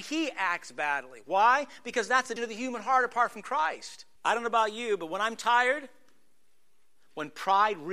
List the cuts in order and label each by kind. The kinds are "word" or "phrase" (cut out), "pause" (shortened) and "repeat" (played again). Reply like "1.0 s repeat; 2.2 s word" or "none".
2.4 s word; 4.2 s pause

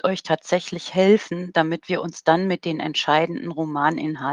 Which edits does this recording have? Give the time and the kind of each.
none

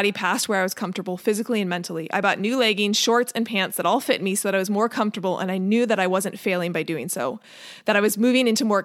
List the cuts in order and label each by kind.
none

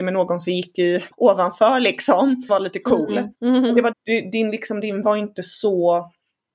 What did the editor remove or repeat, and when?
1.1 s word; 2.5 s word; 3.3 s pause; 3.9 s word; 5.0 s word

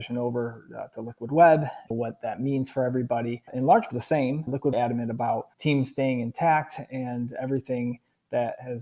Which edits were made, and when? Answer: 1.9 s word; 3.9 s phrase; 4.7 s phrase; 5.5 s pause

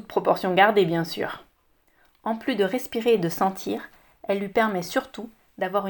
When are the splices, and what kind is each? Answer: none

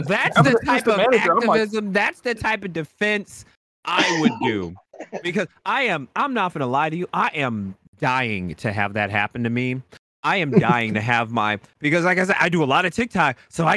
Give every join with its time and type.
none

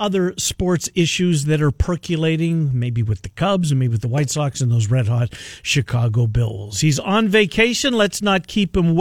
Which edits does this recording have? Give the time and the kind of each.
none

